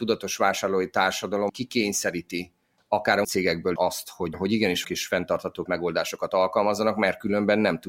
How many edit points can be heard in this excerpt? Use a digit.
6